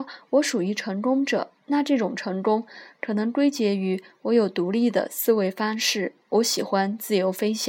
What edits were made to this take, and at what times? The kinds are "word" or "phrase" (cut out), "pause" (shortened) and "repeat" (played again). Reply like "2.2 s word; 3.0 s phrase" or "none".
1.6 s pause; 6.2 s pause